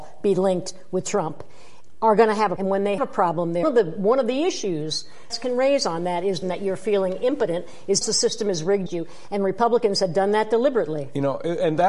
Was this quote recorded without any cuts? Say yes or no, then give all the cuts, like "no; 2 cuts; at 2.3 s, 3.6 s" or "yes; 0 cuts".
no; 7 cuts; at 2.6 s, 3.0 s, 3.6 s, 5.3 s, 6.4 s, 8.0 s, 8.9 s